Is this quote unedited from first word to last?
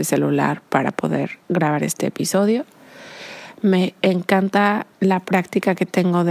no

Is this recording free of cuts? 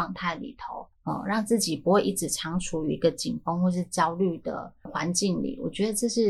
no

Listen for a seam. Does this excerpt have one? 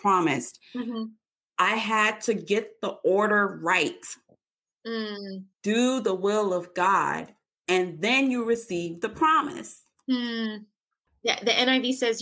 yes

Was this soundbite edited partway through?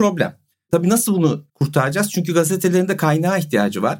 yes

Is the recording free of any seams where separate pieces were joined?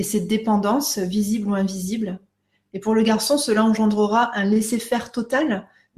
yes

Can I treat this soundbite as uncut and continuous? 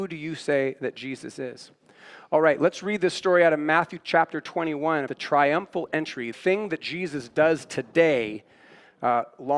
no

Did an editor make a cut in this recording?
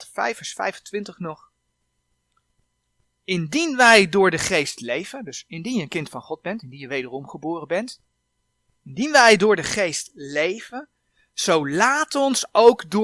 no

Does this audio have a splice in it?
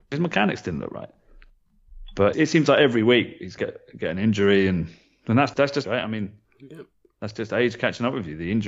yes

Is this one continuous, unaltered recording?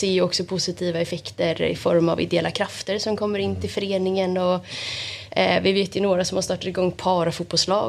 yes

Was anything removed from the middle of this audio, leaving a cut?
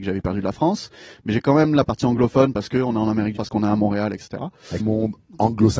yes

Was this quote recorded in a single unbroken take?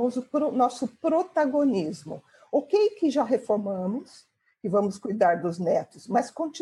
yes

